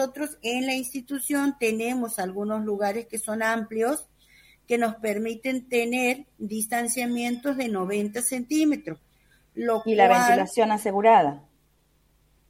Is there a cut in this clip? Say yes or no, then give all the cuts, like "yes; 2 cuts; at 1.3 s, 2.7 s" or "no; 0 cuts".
no; 0 cuts